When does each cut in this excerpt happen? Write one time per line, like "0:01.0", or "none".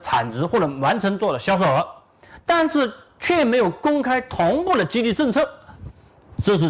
none